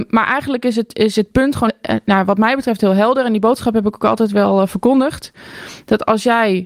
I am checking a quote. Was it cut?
yes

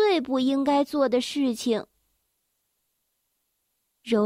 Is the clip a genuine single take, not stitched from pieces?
yes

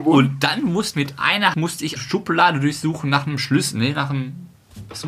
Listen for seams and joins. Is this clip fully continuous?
no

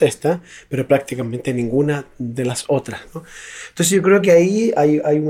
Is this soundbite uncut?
yes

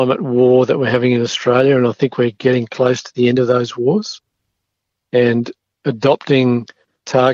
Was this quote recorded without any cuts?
yes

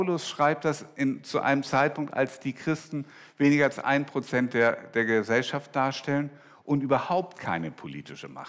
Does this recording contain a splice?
no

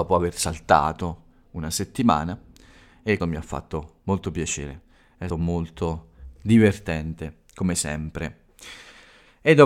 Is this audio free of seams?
no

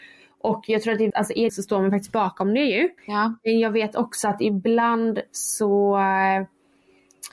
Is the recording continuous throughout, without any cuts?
no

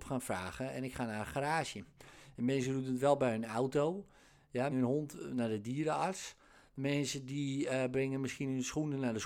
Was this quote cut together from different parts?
yes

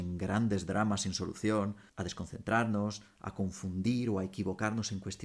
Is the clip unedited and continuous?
no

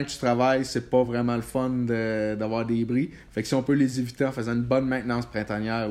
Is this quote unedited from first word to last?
yes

